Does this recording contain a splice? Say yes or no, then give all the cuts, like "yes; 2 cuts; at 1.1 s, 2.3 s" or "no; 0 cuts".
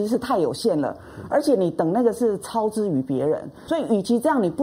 yes; 1 cut; at 3.7 s